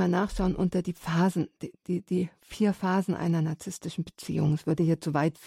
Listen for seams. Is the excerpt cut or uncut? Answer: uncut